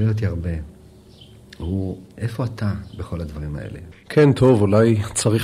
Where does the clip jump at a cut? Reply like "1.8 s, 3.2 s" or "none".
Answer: 2.1 s